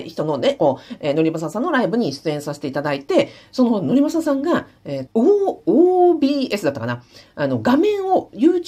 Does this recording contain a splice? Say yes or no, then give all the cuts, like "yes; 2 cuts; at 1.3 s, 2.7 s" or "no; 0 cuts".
yes; 1 cut; at 5.1 s